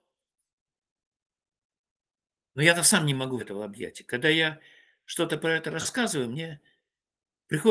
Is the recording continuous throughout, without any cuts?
no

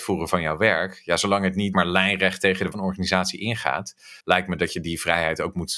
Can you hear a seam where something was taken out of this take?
yes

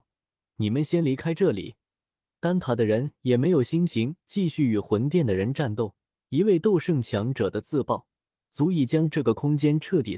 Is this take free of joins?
no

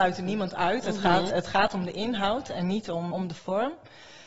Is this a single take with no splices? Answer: no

